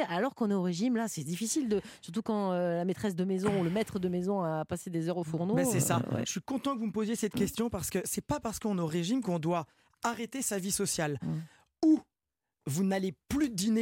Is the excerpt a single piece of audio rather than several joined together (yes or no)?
yes